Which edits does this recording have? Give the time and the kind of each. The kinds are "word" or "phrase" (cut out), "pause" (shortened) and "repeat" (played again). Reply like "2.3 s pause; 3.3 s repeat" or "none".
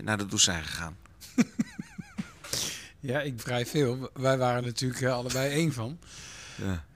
3.4 s phrase; 4.6 s word